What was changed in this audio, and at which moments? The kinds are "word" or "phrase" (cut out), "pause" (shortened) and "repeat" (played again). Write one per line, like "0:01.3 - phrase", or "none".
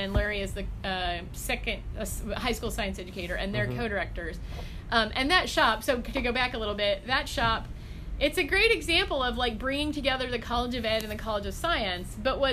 none